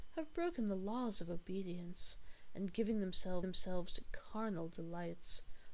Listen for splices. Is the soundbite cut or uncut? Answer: cut